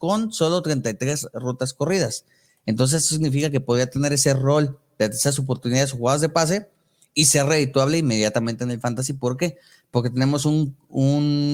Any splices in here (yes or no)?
no